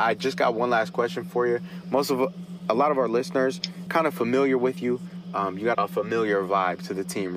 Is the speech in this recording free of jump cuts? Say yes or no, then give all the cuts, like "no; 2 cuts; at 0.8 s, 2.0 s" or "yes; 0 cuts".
no; 2 cuts; at 3.9 s, 5.7 s